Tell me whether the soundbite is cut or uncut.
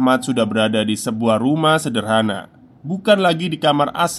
uncut